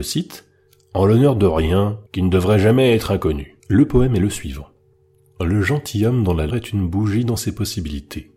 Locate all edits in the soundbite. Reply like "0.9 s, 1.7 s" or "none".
2.1 s, 3.6 s, 4.9 s, 6.5 s